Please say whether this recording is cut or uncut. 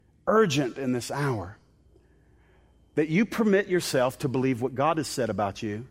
uncut